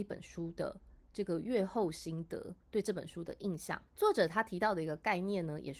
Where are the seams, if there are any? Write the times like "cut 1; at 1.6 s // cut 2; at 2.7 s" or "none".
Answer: cut 1; at 2.6 s // cut 2; at 3.9 s

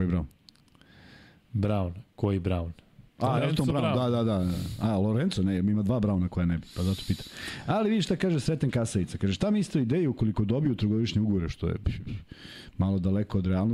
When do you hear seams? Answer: cut 1; at 3.1 s

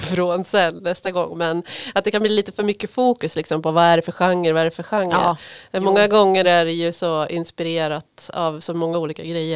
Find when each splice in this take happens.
none

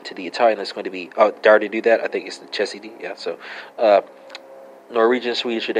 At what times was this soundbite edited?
none

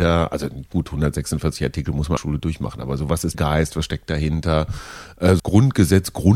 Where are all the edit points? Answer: cut 1; at 2.2 s // cut 2; at 3.3 s // cut 3; at 5.4 s

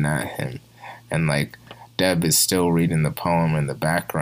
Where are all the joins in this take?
none

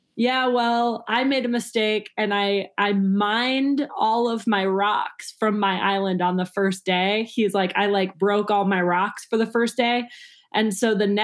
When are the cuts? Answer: none

